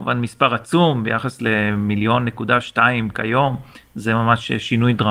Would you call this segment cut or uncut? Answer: uncut